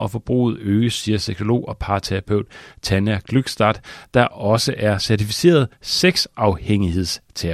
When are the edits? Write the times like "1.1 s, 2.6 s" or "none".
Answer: none